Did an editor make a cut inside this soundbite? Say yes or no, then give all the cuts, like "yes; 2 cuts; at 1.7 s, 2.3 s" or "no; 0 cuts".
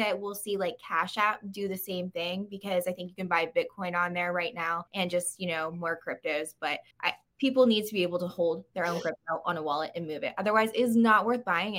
yes; 2 cuts; at 4.9 s, 6.9 s